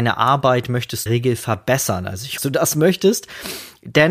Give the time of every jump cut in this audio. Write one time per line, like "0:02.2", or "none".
0:01.1
0:02.4